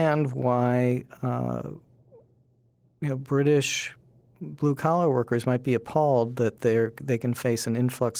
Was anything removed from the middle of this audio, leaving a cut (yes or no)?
no